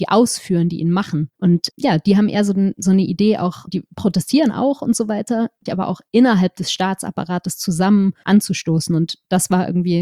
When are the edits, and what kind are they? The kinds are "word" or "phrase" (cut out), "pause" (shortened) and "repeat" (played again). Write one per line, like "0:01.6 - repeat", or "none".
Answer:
0:01.3 - pause
0:03.7 - word
0:05.7 - phrase
0:08.2 - phrase